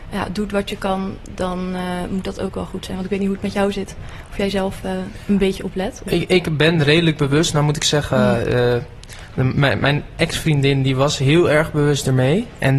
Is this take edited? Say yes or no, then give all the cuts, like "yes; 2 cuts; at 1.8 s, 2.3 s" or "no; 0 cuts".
no; 0 cuts